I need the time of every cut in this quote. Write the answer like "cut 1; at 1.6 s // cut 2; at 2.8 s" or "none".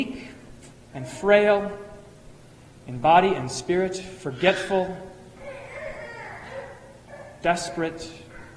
none